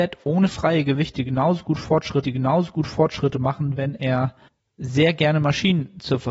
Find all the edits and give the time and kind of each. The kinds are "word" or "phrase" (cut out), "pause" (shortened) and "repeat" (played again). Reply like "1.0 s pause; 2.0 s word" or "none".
2.2 s repeat; 4.5 s pause